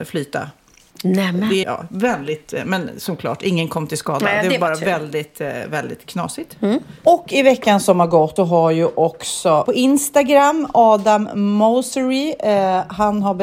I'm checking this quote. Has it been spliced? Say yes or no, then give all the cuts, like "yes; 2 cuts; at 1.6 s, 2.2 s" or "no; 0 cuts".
yes; 3 cuts; at 1.6 s, 8.4 s, 9.6 s